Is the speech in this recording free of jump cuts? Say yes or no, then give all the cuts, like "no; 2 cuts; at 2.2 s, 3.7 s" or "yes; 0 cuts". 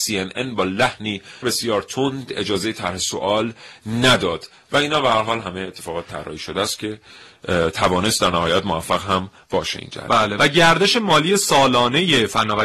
no; 1 cut; at 1.4 s